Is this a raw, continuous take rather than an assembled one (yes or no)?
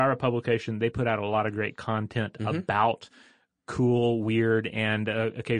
yes